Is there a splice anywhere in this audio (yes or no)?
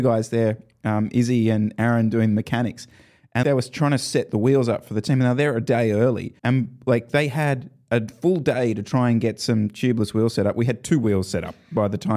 yes